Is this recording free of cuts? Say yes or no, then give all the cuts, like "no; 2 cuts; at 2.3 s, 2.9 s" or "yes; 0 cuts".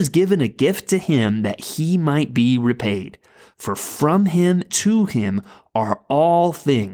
no; 1 cut; at 4.7 s